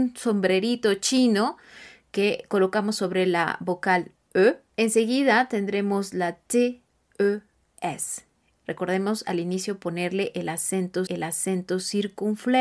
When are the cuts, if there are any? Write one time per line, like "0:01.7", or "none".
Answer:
0:11.1

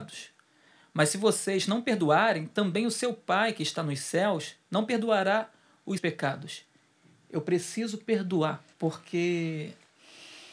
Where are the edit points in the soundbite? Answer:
0:06.0
0:08.7

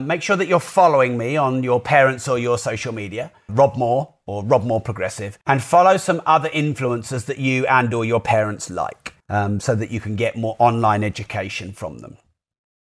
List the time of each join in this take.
0:03.5
0:05.4
0:09.2

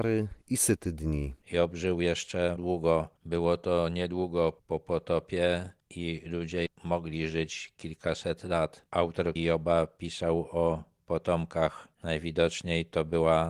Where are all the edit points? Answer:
0:01.4
0:02.6
0:04.6
0:06.7
0:09.4

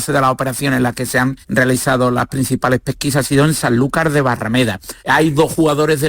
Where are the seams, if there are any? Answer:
0:01.4
0:05.0

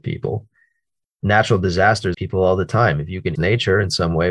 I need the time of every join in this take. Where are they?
0:02.1
0:03.4

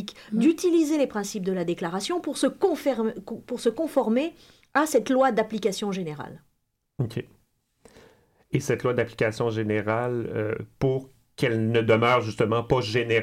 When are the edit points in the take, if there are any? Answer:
none

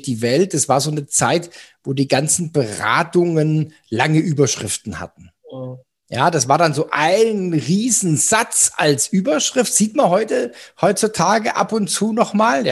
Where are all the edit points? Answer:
none

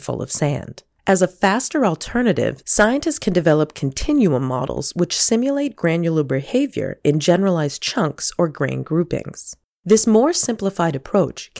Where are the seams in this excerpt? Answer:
none

